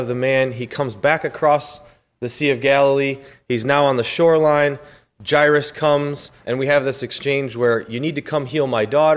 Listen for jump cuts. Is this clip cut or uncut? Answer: uncut